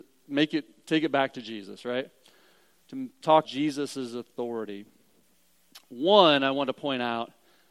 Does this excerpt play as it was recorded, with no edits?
no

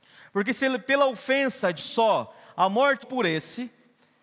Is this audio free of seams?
no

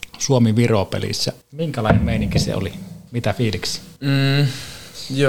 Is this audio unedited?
no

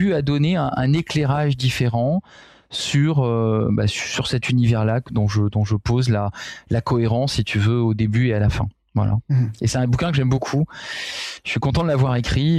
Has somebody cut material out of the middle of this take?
no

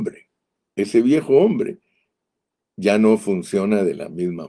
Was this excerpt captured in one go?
yes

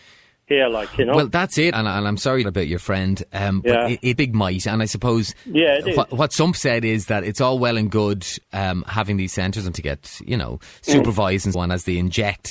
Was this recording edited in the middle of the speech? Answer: yes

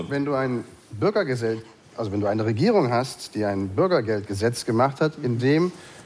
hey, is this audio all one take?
yes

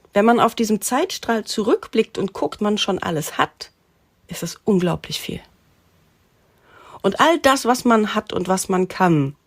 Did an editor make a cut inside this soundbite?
yes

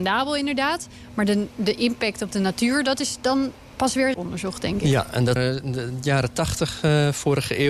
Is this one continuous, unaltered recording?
no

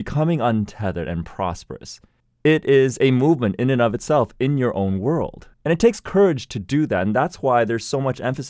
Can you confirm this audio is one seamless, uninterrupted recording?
no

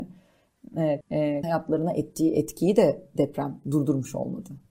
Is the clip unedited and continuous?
no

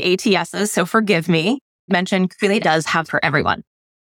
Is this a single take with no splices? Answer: no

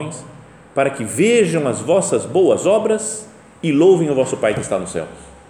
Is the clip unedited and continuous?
yes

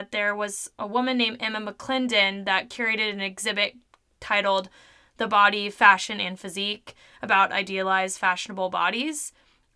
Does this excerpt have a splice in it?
no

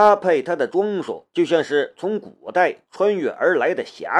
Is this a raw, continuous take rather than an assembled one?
no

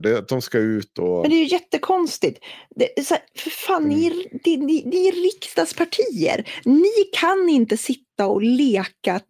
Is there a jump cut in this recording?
no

